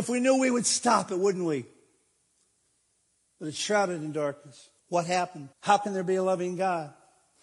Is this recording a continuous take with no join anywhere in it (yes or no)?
no